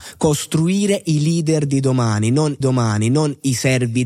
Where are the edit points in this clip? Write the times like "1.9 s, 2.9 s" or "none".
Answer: 2.6 s